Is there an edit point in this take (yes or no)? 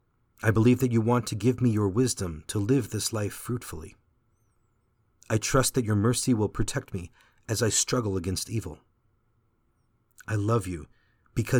no